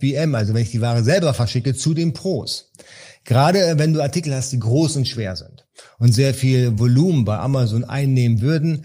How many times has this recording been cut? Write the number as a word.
zero